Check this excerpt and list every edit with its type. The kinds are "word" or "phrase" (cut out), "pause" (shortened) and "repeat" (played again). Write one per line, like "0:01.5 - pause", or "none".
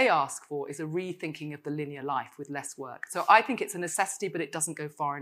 none